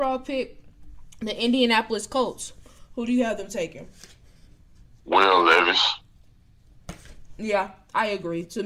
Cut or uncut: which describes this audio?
cut